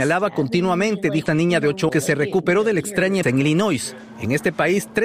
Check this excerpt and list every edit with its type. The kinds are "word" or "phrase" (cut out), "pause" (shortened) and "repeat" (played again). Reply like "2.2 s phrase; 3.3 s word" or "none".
1.3 s word; 1.9 s word; 3.2 s word